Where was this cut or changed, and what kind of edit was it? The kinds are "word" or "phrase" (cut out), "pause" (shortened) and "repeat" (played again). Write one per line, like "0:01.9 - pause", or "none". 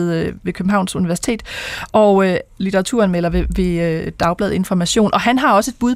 none